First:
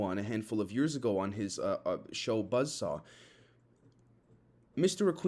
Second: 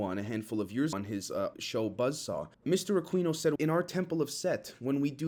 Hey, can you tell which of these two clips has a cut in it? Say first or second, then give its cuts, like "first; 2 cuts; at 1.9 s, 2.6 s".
second; 4 cuts; at 0.9 s, 1.5 s, 2.5 s, 3.6 s